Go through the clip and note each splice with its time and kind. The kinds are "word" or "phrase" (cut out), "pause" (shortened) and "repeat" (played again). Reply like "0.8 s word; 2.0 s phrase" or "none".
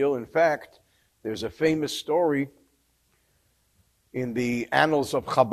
none